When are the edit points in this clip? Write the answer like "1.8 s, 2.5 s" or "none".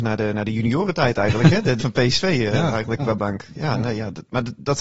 1.8 s, 3.0 s